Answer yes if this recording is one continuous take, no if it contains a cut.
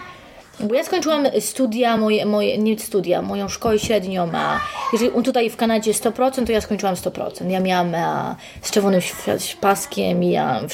yes